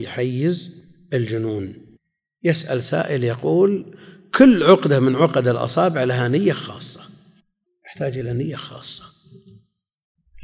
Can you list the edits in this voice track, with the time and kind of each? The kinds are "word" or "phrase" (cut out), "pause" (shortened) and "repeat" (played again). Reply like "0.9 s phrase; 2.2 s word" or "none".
none